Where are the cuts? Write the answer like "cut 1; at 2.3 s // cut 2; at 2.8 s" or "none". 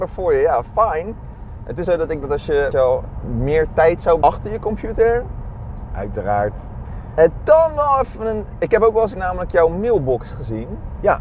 cut 1; at 1.8 s // cut 2; at 2.2 s // cut 3; at 2.7 s // cut 4; at 3.2 s // cut 5; at 4.2 s // cut 6; at 9.2 s